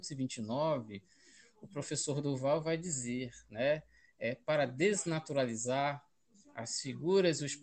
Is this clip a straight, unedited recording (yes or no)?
yes